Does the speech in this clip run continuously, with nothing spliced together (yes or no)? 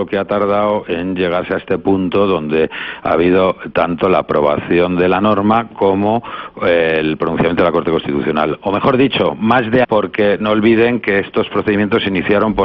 no